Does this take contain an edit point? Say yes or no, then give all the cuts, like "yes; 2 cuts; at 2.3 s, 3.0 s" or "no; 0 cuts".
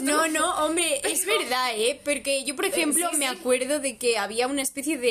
no; 0 cuts